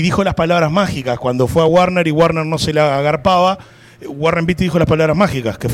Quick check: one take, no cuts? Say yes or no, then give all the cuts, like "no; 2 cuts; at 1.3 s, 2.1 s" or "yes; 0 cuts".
yes; 0 cuts